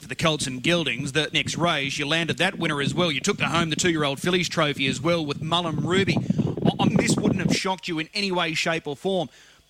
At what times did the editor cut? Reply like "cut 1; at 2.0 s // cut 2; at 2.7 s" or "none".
cut 1; at 1.3 s // cut 2; at 6.9 s